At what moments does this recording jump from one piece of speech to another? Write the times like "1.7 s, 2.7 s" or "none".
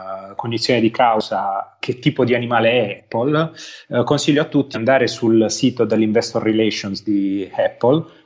1.8 s, 3.0 s, 4.7 s